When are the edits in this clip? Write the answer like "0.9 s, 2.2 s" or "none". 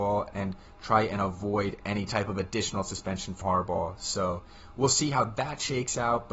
2.1 s, 3.4 s